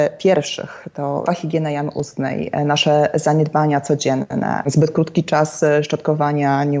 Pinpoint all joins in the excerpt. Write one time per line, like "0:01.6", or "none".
0:01.3